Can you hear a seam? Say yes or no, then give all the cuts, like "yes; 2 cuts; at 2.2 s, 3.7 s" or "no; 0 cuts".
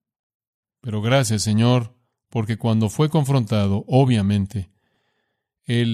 no; 0 cuts